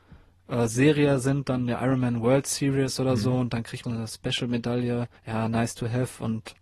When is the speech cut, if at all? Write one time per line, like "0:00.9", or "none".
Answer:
0:03.8
0:05.2